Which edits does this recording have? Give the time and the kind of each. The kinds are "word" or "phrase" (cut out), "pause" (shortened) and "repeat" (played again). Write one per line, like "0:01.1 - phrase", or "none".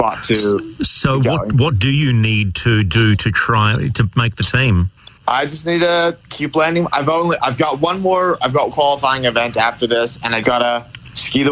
0:08.7 - phrase
0:10.4 - word